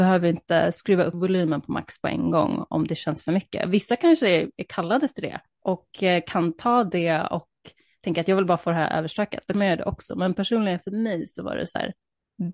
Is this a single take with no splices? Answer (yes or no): yes